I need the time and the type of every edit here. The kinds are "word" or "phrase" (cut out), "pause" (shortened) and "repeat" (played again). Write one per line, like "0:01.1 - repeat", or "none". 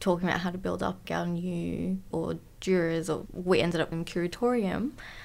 0:01.0 - word
0:02.1 - word
0:03.3 - word
0:03.9 - word